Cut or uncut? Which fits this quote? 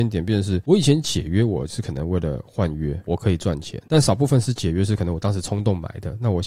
cut